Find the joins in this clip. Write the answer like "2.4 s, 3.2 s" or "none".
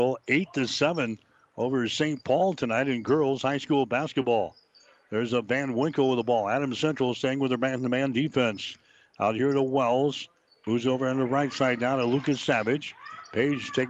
none